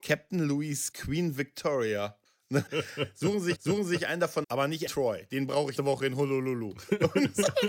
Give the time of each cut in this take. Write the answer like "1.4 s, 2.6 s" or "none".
0.9 s, 2.3 s, 2.7 s, 3.6 s, 4.4 s, 4.9 s, 5.8 s